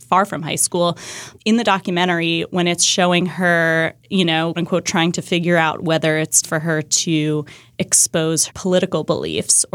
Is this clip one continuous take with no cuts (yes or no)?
no